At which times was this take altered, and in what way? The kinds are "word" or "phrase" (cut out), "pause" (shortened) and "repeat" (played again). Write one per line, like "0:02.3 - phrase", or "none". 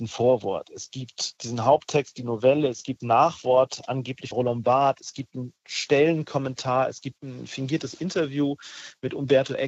0:03.0 - word
0:04.3 - word
0:07.2 - word

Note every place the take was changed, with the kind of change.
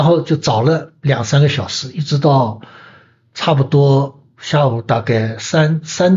none

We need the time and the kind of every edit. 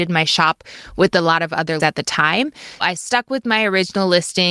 0:01.8 - word
0:02.8 - word

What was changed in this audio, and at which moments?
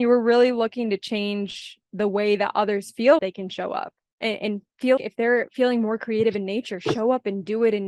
0:01.8 - pause
0:03.2 - word
0:04.0 - pause
0:05.0 - word

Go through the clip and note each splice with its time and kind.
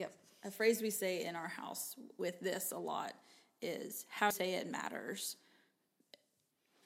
0:04.3 - word

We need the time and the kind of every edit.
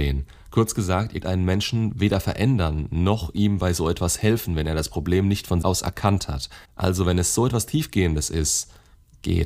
0:01.2 - word
0:05.6 - word
0:06.6 - pause

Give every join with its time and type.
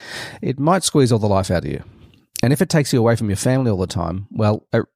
none

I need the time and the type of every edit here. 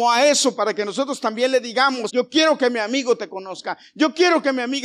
0:02.1 - word

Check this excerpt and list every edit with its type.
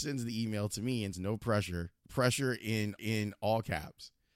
0:01.1 - word
0:02.0 - pause
0:03.0 - repeat

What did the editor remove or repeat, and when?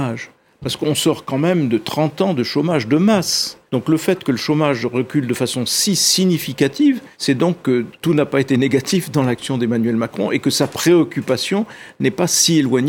0:03.7 - pause
0:07.1 - pause

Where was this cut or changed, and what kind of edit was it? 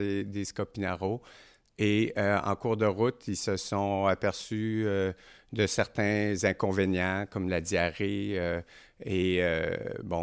none

